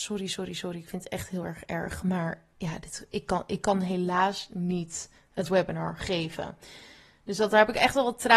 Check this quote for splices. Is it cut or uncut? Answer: uncut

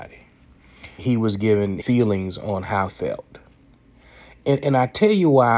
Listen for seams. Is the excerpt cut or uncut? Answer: cut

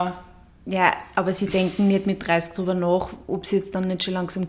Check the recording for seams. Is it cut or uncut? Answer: uncut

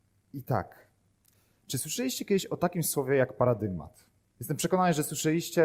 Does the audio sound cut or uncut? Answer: uncut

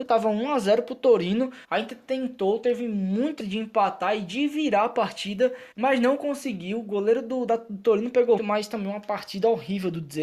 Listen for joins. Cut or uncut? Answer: cut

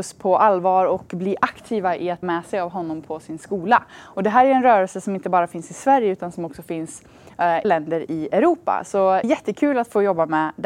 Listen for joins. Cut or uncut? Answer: cut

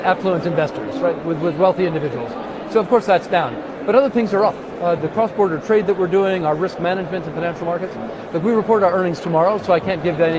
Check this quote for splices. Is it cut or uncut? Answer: cut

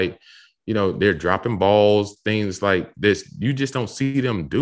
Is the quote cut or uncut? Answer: uncut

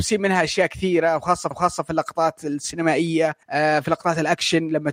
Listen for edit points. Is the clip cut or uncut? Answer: cut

